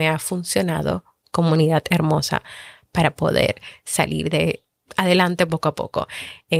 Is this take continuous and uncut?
yes; 0 cuts

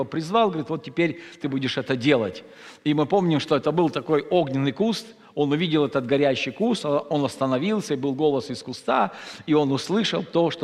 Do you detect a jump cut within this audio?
no; 0 cuts

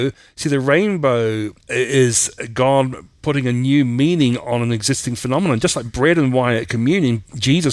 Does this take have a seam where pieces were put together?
yes; 2 cuts; at 1.6 s, 3.2 s

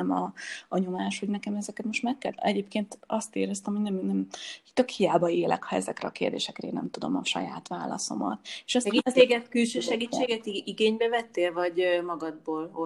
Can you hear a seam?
no; 0 cuts

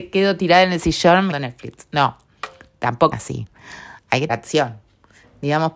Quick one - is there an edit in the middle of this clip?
yes; 3 cuts; at 1.3 s, 3.1 s, 4.3 s

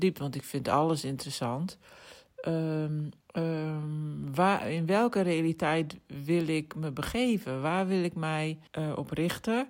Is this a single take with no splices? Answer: no; 2 cuts; at 3.2 s, 8.7 s

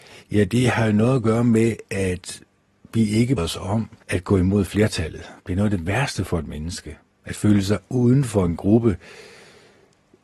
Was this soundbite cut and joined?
yes; 4 cuts; at 2.7 s, 3.4 s, 4.0 s, 5.4 s

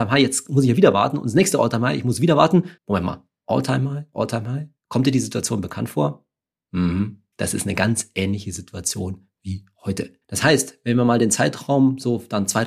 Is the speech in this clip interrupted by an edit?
yes; 4 cuts; at 2.8 s, 4.8 s, 7.3 s, 10.2 s

